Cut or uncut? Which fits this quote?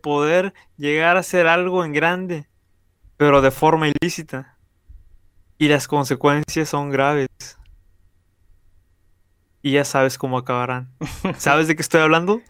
uncut